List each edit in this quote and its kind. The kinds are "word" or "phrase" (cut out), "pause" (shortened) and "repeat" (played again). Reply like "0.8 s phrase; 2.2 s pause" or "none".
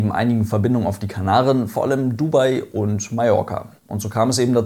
3.8 s pause